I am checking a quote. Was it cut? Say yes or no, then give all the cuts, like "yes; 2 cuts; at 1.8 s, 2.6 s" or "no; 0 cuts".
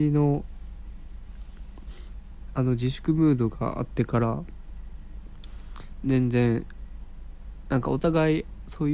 yes; 1 cut; at 2.5 s